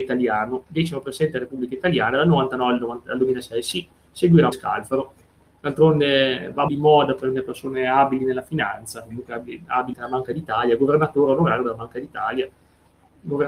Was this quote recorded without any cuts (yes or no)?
no